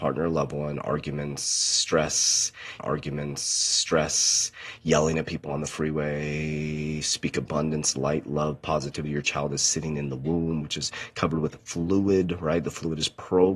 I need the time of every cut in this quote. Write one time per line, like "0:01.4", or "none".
0:02.8